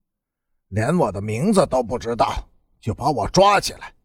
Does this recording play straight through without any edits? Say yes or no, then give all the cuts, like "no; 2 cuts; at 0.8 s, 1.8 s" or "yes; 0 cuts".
yes; 0 cuts